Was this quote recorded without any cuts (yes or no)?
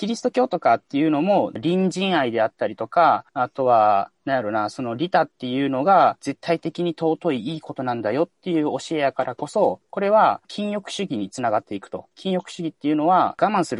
yes